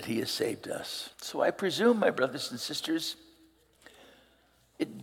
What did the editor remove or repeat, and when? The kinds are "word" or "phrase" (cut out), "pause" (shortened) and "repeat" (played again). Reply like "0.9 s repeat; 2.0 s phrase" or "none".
1.1 s pause